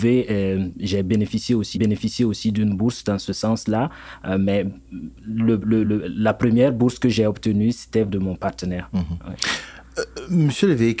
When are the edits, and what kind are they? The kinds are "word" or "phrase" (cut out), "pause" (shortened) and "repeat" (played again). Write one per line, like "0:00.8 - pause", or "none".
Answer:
0:01.7 - repeat
0:05.1 - pause
0:05.8 - word
0:08.1 - word